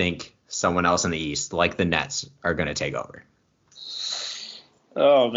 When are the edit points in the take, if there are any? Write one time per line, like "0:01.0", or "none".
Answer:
none